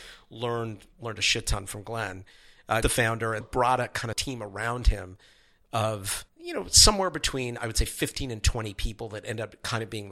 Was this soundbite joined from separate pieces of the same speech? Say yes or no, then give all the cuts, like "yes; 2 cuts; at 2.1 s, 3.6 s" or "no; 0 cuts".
yes; 4 cuts; at 2.8 s, 3.4 s, 4.1 s, 6.3 s